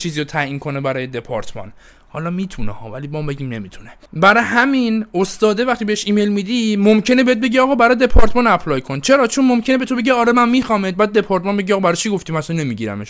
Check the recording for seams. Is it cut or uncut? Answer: uncut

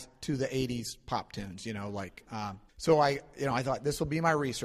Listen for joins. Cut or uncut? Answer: cut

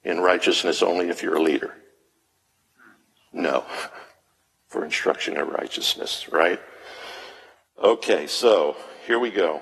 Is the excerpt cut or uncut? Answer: uncut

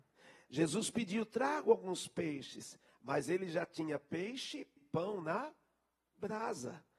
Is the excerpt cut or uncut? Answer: cut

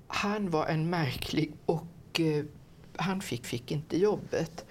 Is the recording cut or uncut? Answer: cut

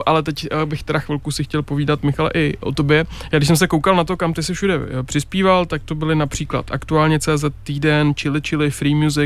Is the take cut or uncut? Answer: uncut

